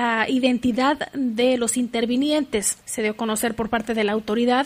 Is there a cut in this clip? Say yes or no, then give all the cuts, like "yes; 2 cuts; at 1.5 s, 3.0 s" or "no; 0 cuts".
yes; 1 cut; at 2.8 s